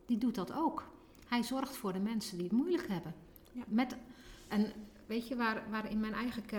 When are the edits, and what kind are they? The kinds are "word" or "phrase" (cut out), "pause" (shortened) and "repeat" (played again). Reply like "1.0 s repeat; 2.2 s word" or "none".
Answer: none

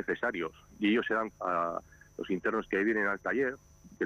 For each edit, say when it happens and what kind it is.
1.3 s word

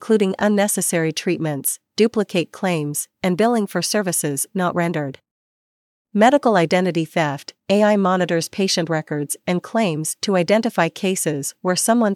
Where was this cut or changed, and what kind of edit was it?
none

